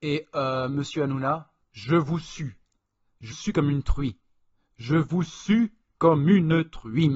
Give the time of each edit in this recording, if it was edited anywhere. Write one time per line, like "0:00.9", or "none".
0:01.6
0:03.3